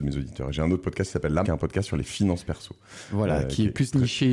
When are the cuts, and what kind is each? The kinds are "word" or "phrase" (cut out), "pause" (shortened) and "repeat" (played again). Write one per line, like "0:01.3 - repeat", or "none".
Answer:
0:01.4 - word